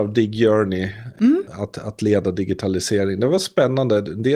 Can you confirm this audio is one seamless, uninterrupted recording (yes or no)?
yes